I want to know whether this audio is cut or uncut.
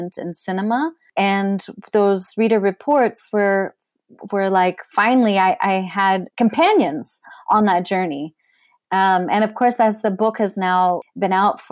uncut